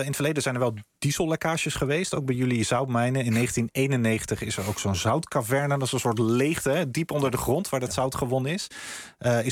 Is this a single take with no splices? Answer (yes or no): yes